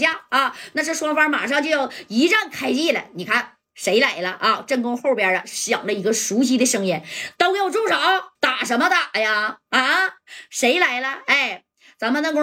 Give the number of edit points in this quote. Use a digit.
1